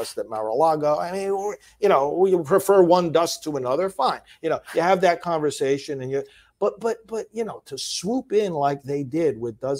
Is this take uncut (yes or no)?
yes